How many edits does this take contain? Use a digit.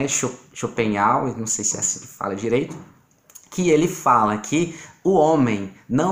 0